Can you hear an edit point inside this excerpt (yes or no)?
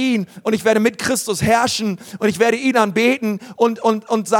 no